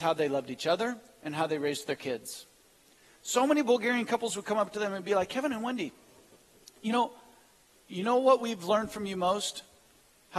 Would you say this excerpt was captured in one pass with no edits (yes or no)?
yes